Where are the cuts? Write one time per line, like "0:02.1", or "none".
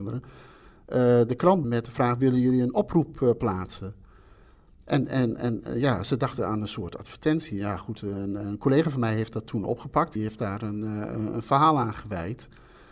0:01.6
0:10.2

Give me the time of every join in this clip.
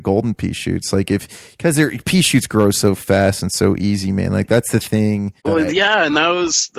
0:05.4

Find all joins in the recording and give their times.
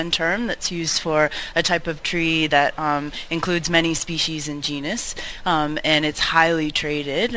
none

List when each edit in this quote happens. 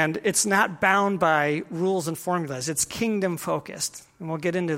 none

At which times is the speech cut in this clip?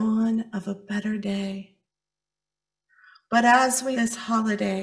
0:03.9

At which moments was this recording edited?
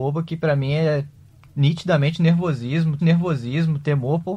0:03.0

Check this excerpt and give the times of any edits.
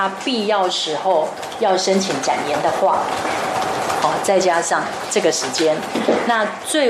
none

